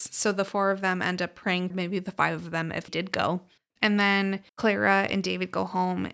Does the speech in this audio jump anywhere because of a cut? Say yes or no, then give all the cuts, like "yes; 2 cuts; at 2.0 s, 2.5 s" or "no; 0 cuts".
yes; 4 cuts; at 1.7 s, 2.9 s, 3.6 s, 4.5 s